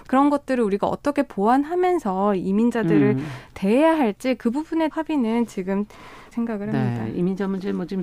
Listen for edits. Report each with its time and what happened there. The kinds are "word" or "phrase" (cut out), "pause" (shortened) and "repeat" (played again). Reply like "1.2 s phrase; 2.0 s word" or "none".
4.9 s phrase; 6.3 s word